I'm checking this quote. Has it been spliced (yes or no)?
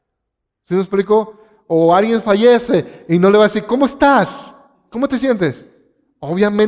no